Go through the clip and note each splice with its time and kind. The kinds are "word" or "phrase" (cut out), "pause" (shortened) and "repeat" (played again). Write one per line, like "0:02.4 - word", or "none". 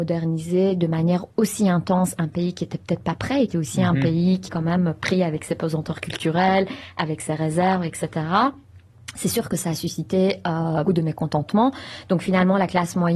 0:03.5 - word
0:04.5 - word
0:10.9 - word